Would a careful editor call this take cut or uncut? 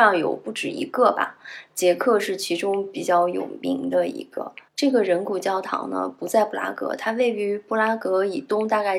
cut